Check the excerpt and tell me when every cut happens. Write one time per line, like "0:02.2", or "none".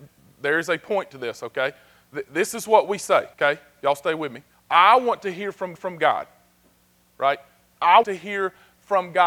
0:03.3
0:04.5
0:05.8
0:08.0